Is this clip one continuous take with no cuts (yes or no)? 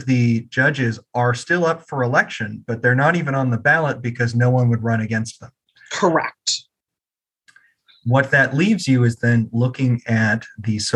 yes